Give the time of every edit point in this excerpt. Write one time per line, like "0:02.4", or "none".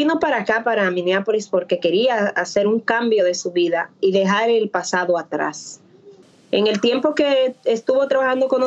none